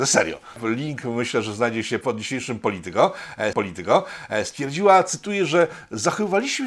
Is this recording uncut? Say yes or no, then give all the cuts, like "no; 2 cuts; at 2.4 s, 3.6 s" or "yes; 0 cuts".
no; 2 cuts; at 2.0 s, 3.5 s